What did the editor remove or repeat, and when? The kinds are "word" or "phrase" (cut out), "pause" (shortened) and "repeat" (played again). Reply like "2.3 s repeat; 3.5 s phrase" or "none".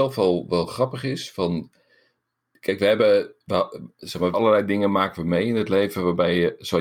2.5 s word; 3.4 s pause; 4.3 s word